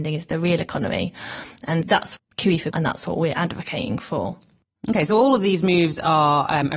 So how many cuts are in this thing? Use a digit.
3